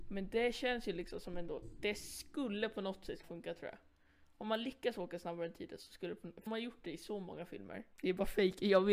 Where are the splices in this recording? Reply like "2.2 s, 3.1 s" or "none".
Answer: 3.2 s, 6.5 s, 7.9 s